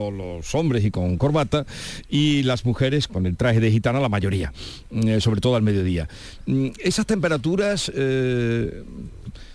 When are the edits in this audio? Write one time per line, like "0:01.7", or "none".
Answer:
0:03.1

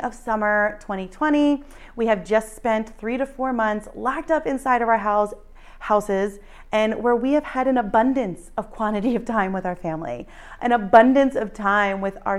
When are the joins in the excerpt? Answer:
none

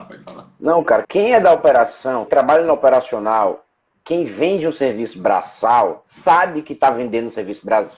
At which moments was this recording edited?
0:01.0
0:02.3

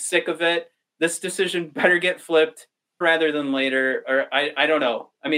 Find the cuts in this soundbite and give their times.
0:03.0

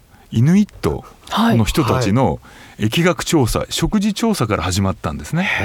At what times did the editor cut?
none

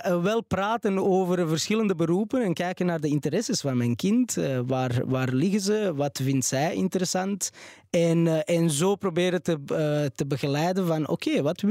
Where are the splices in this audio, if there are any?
none

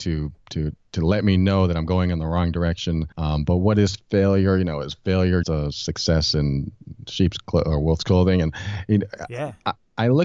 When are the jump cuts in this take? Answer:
0:03.1
0:05.4

